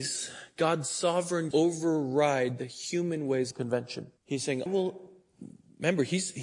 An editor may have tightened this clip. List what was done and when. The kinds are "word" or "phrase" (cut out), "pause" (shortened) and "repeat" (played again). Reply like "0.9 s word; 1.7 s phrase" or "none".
1.5 s word; 3.5 s phrase; 4.2 s pause; 4.7 s word